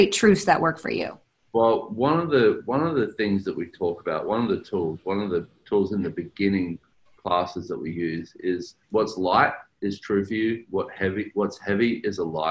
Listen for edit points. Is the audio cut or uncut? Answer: cut